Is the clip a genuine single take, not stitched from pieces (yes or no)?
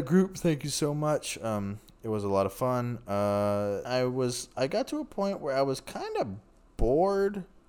no